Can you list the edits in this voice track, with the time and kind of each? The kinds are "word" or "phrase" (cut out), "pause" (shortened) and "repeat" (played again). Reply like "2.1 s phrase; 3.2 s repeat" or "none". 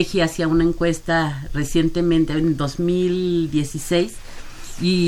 none